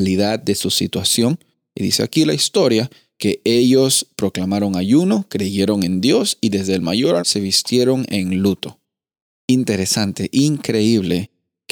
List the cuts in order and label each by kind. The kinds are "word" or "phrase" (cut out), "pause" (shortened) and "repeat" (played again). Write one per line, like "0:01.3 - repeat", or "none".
0:07.2 - word